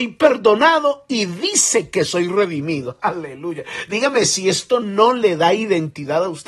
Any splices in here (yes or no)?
no